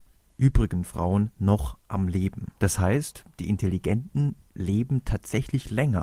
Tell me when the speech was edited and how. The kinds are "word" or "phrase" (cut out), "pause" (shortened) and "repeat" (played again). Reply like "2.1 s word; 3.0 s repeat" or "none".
1.3 s pause; 2.6 s pause